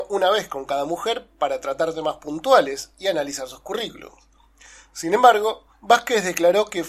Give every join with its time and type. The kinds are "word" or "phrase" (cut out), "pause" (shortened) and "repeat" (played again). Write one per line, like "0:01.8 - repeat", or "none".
none